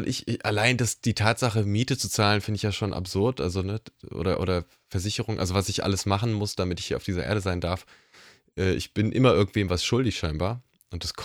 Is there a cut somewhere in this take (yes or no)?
no